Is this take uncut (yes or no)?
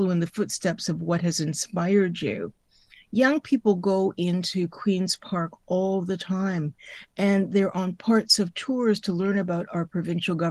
yes